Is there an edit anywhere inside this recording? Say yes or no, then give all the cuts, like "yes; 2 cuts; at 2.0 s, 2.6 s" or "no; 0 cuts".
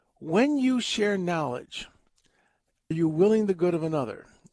yes; 1 cut; at 2.9 s